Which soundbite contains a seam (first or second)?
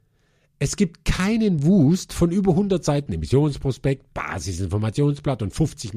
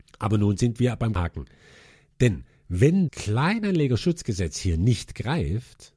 second